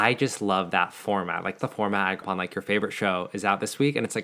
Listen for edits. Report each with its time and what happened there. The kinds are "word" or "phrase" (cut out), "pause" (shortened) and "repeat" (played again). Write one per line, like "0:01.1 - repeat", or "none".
0:01.6 - word
0:02.2 - word